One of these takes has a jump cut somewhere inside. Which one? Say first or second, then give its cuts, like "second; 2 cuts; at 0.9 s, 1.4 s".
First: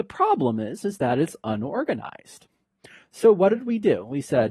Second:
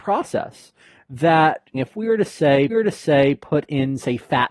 second; 2 cuts; at 1.7 s, 2.7 s